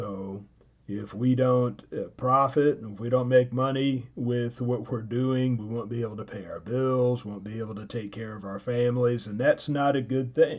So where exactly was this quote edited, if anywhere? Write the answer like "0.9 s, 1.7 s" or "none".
5.6 s